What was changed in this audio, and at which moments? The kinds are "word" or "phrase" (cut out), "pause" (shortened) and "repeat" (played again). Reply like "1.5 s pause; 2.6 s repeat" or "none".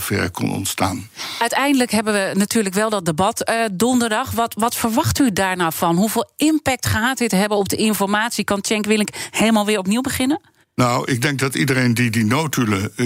10.6 s pause

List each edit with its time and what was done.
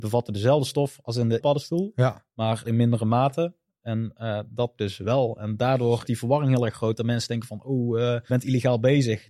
1.4 s word; 2.6 s word; 4.8 s word; 6.1 s word; 8.3 s word

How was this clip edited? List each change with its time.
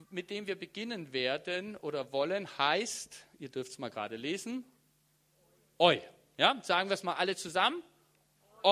none

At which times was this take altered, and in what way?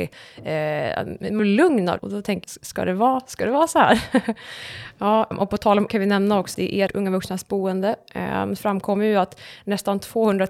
1.4 s word; 2.0 s word; 2.4 s word; 5.3 s word; 5.9 s word; 6.5 s word; 6.9 s word; 8.6 s word

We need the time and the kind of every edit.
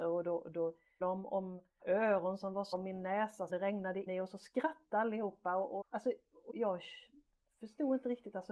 1.0 s word; 1.8 s word; 2.7 s word; 3.5 s word; 4.1 s word; 5.8 s word; 6.5 s word

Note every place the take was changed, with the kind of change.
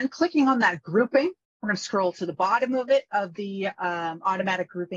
1.4 s pause

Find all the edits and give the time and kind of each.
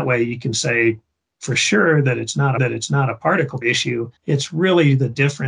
2.6 s repeat; 3.6 s word; 4.2 s pause

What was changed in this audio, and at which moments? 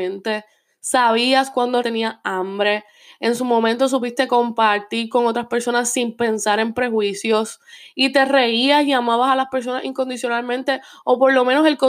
1.8 s word

